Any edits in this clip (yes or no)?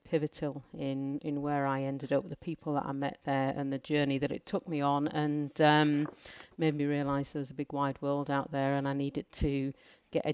no